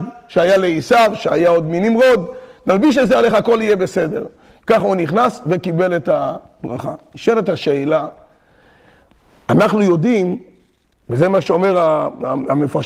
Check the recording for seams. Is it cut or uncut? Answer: uncut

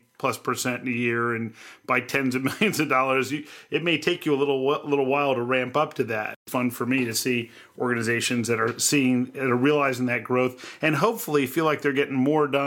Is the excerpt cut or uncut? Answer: cut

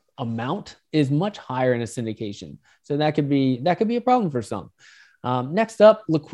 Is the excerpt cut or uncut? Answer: uncut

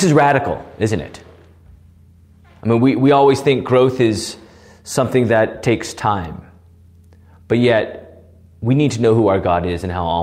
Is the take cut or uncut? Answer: uncut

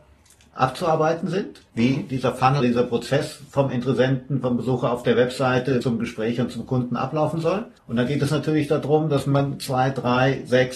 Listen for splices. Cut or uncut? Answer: cut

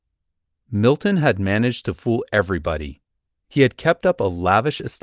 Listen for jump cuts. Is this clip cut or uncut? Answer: uncut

